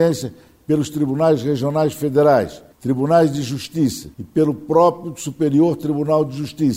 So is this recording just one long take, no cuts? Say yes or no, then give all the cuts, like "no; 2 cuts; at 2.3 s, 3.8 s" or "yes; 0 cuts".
no; 2 cuts; at 2.7 s, 4.1 s